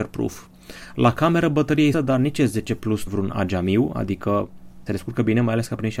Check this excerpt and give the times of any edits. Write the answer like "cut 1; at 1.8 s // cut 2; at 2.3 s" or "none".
cut 1; at 1.9 s // cut 2; at 3.1 s // cut 3; at 4.9 s